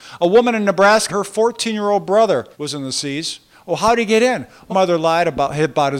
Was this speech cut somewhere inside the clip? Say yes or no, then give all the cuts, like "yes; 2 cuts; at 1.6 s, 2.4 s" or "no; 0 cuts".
yes; 3 cuts; at 1.1 s, 2.5 s, 4.7 s